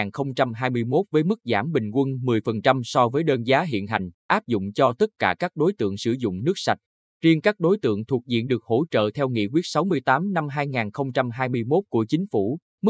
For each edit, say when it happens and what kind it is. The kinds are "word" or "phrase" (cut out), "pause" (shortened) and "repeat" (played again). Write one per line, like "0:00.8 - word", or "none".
none